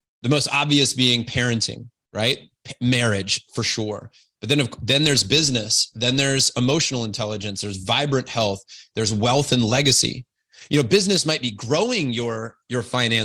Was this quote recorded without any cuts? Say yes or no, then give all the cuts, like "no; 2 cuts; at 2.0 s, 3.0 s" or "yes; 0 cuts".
yes; 0 cuts